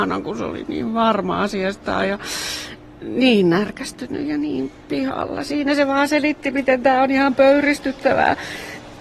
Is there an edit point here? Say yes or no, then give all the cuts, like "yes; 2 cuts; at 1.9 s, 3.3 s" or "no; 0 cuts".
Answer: no; 0 cuts